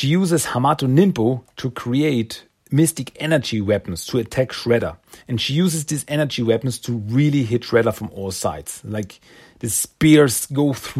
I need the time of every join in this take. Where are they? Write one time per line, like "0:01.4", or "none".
0:05.2

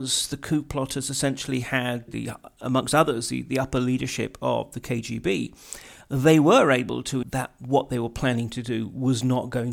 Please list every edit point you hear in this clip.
0:02.1
0:07.2

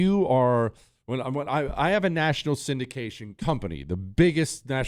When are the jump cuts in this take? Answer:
none

